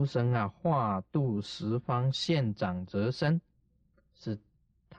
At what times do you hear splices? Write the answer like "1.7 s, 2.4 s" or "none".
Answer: none